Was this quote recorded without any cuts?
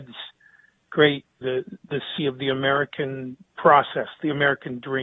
no; 2 cuts; at 1.4 s, 2.2 s

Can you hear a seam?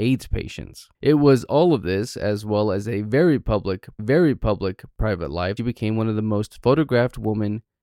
yes; 3 cuts; at 0.9 s, 4.0 s, 5.6 s

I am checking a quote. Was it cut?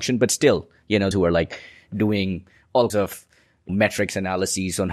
yes; 3 cuts; at 1.1 s, 2.9 s, 3.7 s

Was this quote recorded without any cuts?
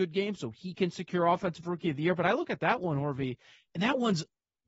yes; 0 cuts

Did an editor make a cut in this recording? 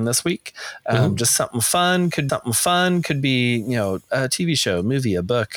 yes; 1 cut; at 2.3 s

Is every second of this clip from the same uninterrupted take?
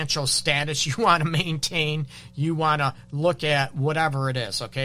yes; 0 cuts

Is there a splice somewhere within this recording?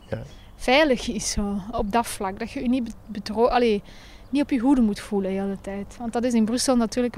no; 0 cuts

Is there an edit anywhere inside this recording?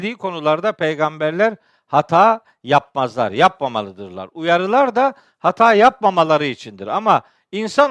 no; 0 cuts

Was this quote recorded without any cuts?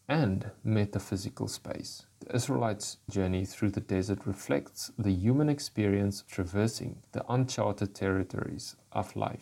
no; 3 cuts; at 2.1 s, 3.1 s, 6.3 s

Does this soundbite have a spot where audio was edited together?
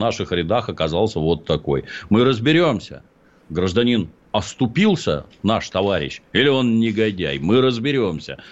no; 0 cuts

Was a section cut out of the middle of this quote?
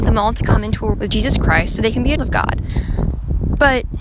yes; 2 cuts; at 0.9 s, 2.2 s

